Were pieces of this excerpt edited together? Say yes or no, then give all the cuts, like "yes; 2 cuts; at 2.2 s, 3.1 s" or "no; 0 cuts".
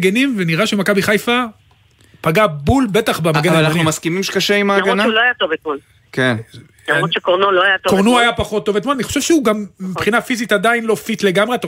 no; 0 cuts